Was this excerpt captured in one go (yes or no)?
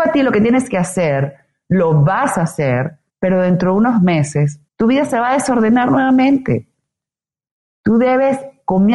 no